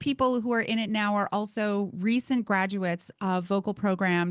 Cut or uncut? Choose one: uncut